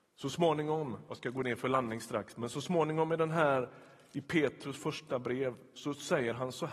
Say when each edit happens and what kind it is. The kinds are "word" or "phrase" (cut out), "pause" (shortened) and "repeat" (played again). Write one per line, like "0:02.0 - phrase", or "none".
none